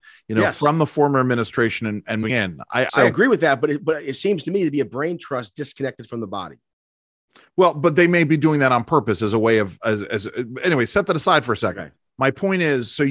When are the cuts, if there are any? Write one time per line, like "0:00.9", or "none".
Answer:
0:02.9